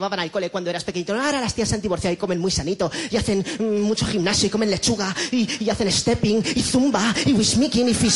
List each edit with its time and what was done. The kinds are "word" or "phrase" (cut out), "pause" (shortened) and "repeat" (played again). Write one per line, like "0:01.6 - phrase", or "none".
0:03.6 - word